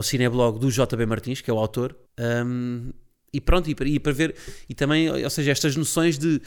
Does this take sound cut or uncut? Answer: cut